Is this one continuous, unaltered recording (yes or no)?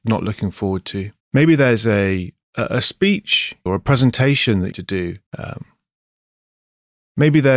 no